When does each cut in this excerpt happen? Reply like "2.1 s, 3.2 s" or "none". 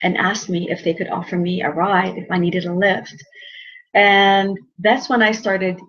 none